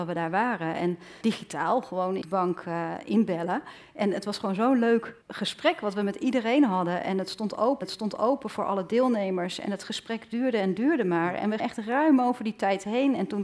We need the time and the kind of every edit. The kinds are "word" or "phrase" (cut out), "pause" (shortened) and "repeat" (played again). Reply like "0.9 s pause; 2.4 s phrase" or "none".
1.2 s word; 2.2 s phrase; 5.2 s pause; 7.8 s repeat; 11.6 s word